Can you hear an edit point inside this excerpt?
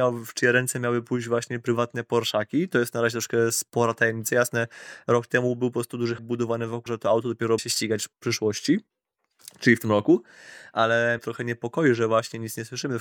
yes; 4 cuts; at 6.2 s, 6.9 s, 7.6 s, 11.2 s

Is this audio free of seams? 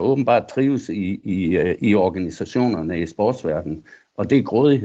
yes; 0 cuts

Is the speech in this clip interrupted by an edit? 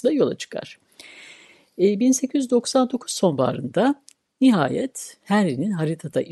no; 0 cuts

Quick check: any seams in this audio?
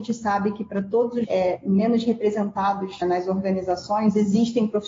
yes; 2 cuts; at 1.2 s, 3.0 s

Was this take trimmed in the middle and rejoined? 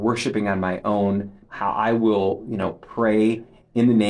yes; 1 cut; at 1.4 s

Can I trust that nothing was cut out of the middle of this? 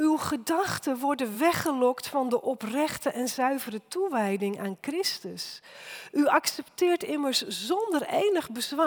yes; 0 cuts

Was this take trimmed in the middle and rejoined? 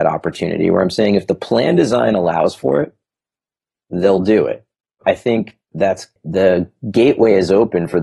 no; 0 cuts

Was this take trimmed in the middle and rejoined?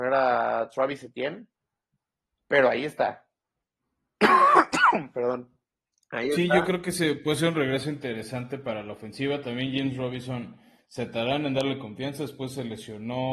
no; 0 cuts

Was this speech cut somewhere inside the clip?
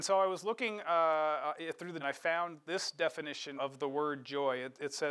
yes; 2 cuts; at 2.0 s, 3.6 s

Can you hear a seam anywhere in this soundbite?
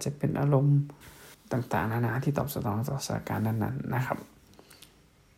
yes; 1 cut; at 1.3 s

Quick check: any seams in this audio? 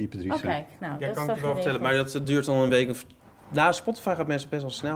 no; 0 cuts

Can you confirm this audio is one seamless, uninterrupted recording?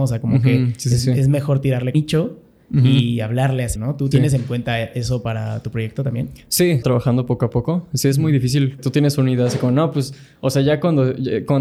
no; 5 cuts; at 1.9 s, 3.8 s, 4.1 s, 6.8 s, 8.8 s

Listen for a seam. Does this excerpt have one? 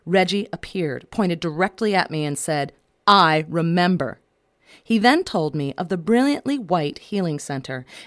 no; 0 cuts

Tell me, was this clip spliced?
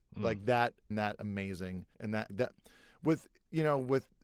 yes; 3 cuts; at 0.9 s, 1.9 s, 2.3 s

